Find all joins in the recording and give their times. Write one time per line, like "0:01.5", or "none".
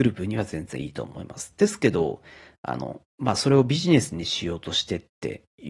0:03.1

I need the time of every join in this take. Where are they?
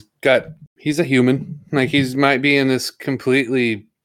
none

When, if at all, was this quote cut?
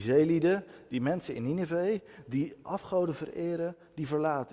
0:02.6

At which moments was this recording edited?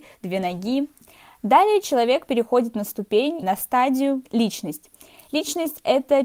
0:03.4
0:04.2

